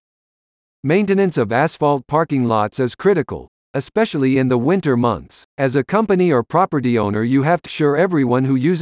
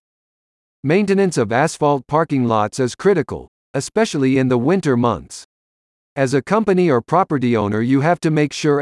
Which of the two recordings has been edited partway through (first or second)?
first